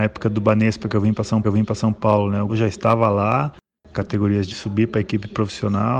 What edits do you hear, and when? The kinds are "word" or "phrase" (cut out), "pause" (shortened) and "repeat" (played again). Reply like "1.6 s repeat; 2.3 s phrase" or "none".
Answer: 1.4 s repeat; 2.5 s word; 3.9 s phrase; 4.5 s word